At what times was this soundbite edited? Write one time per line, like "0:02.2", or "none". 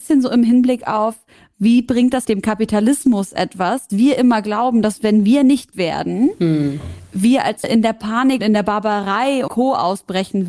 0:02.2
0:03.9
0:05.7
0:07.6
0:08.4
0:09.5

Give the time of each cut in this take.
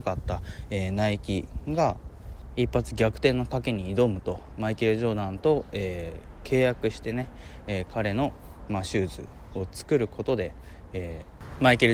none

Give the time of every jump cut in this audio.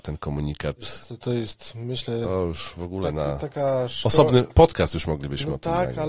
0:04.5

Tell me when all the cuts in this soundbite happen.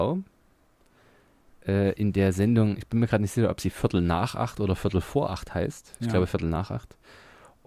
none

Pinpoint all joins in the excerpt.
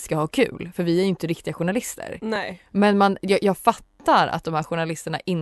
none

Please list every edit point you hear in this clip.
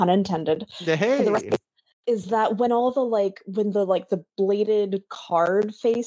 none

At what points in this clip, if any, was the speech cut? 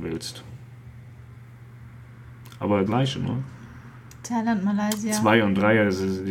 0:02.9

